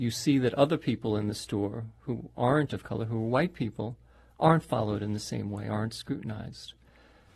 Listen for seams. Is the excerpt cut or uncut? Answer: uncut